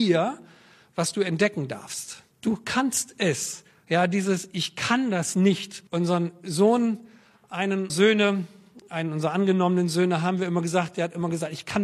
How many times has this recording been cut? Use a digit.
3